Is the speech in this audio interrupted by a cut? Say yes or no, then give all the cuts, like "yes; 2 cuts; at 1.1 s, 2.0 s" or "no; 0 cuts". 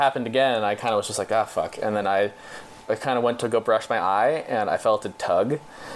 no; 0 cuts